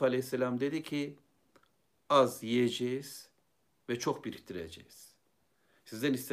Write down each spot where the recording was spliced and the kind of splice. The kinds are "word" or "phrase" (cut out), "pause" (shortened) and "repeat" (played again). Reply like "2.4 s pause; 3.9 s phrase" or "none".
none

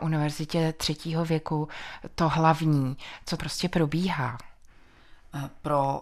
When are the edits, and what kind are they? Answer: 3.4 s word

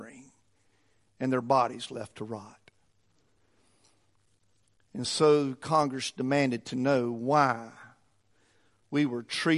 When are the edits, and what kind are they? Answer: none

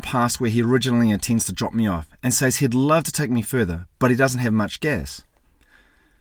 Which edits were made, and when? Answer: none

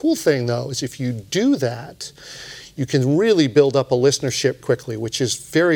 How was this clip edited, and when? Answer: 4.6 s word

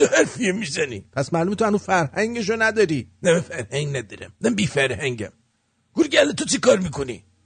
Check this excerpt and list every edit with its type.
1.1 s pause; 3.1 s pause; 4.4 s pause

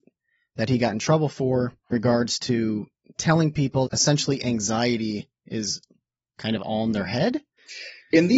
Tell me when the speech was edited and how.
1.9 s word; 3.9 s word

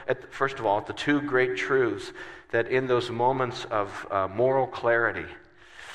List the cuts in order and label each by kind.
none

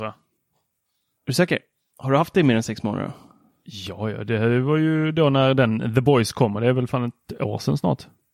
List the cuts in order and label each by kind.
none

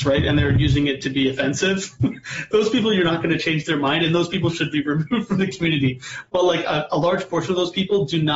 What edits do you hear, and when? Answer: none

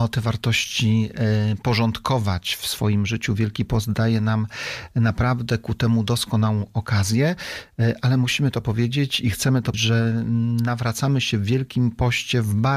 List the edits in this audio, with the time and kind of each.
9.7 s word

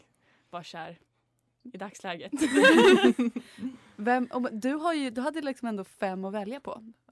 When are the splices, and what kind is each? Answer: none

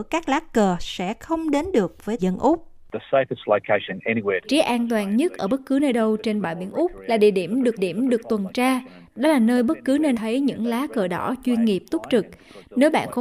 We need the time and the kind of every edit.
2.2 s phrase; 4.4 s word; 7.8 s repeat; 10.1 s phrase

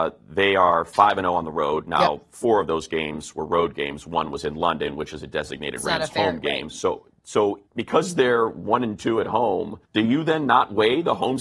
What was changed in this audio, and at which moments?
7.7 s pause; 9.8 s pause

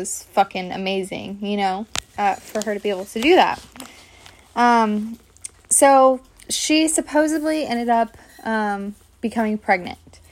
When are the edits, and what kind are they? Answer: none

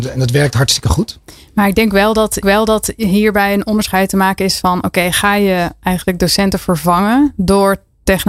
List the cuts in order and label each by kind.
2.4 s repeat

